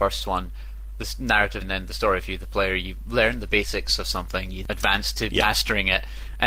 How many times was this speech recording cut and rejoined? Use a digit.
2